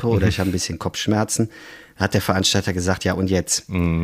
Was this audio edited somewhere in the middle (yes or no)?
no